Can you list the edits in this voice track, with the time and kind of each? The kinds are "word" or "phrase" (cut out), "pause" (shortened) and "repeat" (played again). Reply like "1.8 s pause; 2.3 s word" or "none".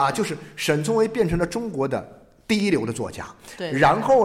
none